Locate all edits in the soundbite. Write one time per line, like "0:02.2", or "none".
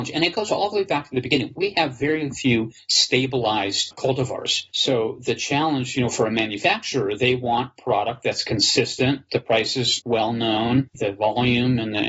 none

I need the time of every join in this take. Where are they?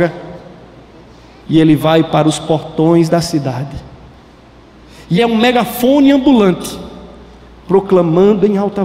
0:05.2

